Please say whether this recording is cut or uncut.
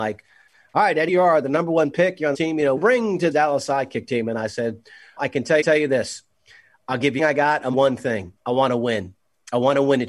cut